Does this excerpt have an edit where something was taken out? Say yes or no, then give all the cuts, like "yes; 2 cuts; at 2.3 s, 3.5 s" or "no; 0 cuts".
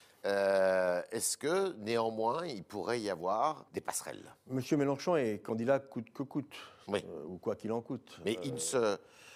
yes; 1 cut; at 3.7 s